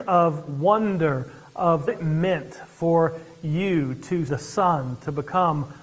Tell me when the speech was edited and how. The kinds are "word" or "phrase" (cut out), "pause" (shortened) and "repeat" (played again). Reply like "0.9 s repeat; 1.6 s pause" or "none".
1.9 s word; 4.3 s word